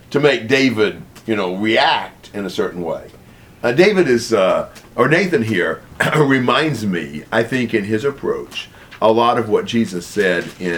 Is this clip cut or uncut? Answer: uncut